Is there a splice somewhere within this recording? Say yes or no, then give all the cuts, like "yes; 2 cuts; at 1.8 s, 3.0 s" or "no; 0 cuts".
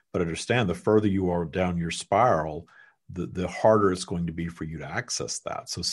no; 0 cuts